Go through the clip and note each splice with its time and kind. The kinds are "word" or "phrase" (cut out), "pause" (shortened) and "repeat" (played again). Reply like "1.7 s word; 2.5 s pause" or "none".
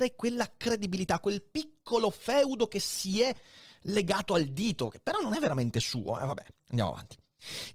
none